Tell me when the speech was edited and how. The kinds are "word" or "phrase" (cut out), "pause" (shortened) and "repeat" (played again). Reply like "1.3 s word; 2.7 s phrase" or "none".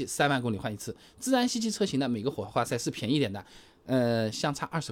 none